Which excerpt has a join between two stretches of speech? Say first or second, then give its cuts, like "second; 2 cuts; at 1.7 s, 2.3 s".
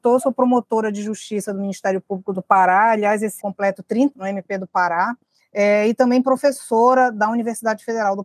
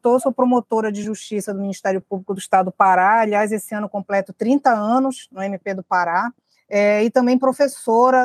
first; 3 cuts; at 2.3 s, 3.4 s, 4.1 s